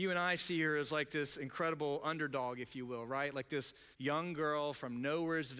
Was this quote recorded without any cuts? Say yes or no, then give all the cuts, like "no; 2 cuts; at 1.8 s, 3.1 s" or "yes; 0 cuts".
no; 1 cut; at 3.9 s